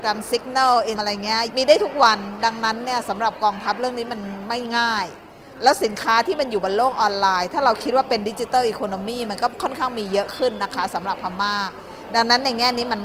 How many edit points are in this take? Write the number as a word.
two